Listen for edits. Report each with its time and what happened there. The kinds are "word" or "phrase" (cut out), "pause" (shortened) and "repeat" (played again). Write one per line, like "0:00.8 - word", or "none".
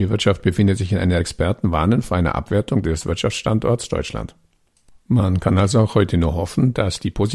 0:01.2 - phrase